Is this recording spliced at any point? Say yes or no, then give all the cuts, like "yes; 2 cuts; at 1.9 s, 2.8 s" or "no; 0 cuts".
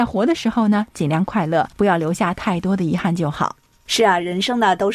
yes; 1 cut; at 1.7 s